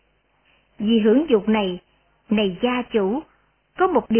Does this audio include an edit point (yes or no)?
no